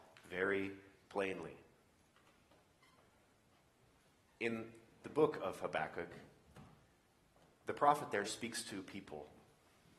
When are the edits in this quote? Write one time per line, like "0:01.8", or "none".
0:08.3